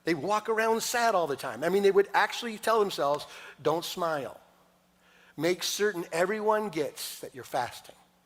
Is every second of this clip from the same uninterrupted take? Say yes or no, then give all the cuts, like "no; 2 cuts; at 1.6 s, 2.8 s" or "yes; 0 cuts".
yes; 0 cuts